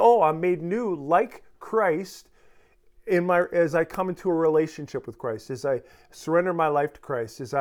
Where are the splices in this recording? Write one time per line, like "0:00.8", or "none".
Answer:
none

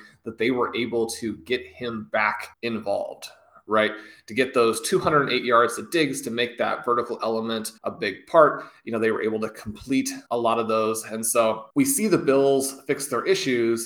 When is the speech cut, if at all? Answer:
0:02.5
0:07.8
0:10.3
0:11.7

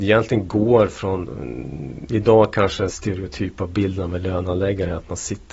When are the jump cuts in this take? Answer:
0:02.9

